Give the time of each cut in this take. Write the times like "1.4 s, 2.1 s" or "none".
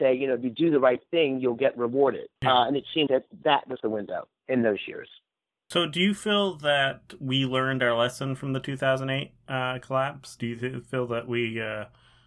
2.4 s, 3.1 s, 3.8 s, 9.4 s